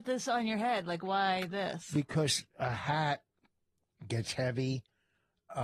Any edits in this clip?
no; 0 cuts

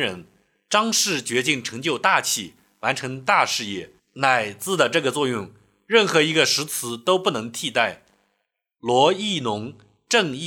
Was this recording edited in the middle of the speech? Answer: no; 0 cuts

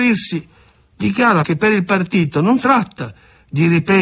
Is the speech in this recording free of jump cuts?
no; 2 cuts; at 1.4 s, 2.6 s

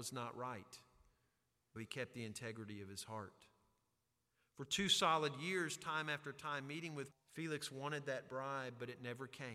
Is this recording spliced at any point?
yes; 2 cuts; at 1.8 s, 7.1 s

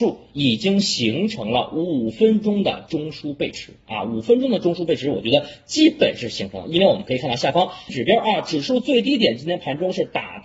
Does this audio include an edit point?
yes; 1 cut; at 7.9 s

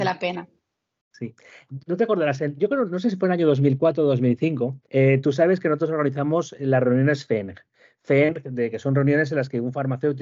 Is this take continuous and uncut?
no; 1 cut; at 4.8 s

